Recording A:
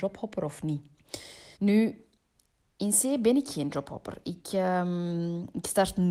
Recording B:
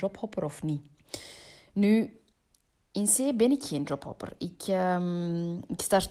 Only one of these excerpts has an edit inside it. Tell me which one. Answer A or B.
A